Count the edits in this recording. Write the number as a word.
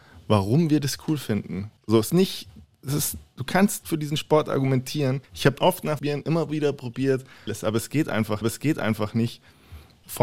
eight